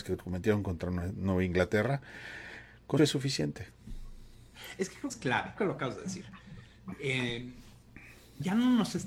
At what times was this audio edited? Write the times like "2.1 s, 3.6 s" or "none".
3.0 s, 5.1 s, 5.6 s